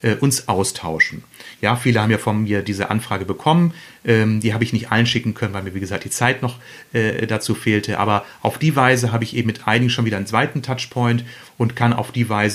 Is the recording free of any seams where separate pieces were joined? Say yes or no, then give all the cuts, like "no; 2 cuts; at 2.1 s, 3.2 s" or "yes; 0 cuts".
yes; 0 cuts